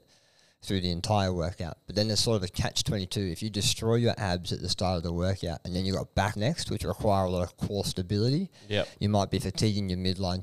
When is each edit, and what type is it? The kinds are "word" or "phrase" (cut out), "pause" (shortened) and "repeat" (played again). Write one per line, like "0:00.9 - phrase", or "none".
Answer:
0:06.3 - word